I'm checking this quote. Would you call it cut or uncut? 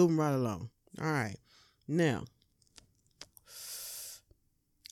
uncut